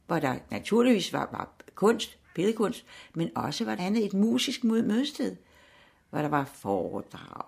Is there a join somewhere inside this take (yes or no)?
yes